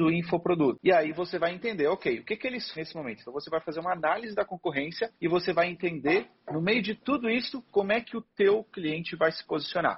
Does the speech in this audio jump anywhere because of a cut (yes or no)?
yes